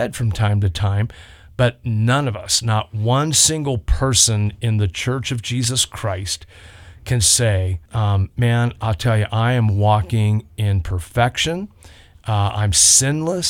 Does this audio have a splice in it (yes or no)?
yes